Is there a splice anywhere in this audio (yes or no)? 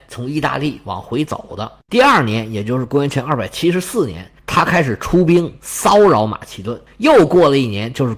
yes